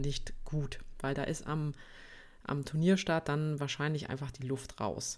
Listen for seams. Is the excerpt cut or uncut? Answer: uncut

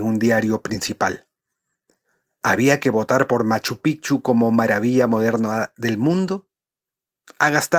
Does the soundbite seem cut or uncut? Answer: uncut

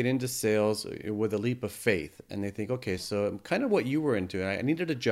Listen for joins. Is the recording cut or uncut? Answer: uncut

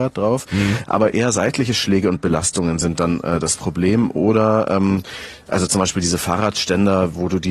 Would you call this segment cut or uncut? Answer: uncut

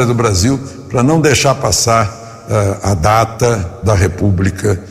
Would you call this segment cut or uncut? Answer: uncut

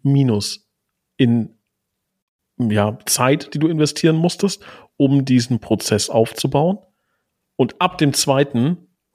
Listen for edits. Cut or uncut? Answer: uncut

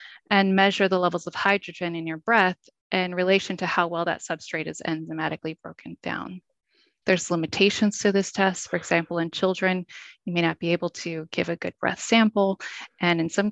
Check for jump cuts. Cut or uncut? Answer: uncut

